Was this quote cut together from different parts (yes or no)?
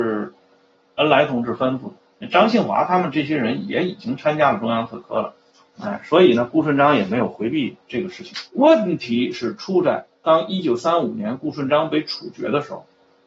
yes